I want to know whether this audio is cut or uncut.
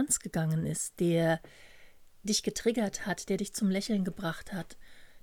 uncut